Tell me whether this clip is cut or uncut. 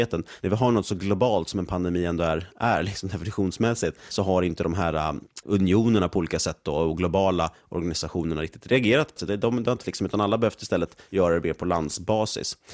cut